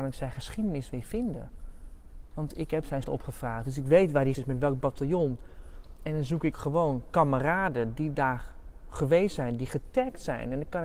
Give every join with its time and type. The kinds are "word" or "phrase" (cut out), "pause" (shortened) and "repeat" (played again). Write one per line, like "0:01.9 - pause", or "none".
0:03.0 - word
0:04.3 - word
0:06.5 - word